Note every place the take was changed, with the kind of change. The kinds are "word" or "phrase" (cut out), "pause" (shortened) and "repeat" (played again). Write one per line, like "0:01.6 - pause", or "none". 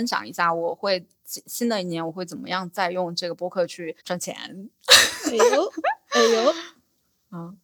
0:01.1 - pause
0:04.0 - pause